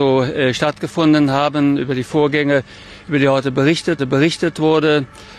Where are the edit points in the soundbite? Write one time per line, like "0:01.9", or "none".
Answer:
0:04.0